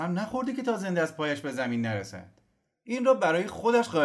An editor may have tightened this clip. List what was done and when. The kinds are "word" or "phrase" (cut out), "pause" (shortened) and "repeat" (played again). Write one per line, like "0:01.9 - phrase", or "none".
none